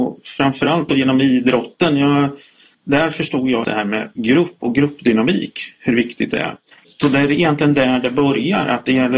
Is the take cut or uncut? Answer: cut